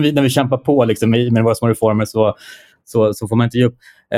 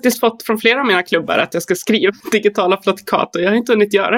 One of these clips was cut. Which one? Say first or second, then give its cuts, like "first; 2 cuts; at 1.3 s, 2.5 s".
second; 1 cut; at 2.2 s